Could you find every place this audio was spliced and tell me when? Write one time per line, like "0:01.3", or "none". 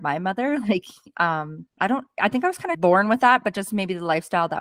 0:01.7
0:02.7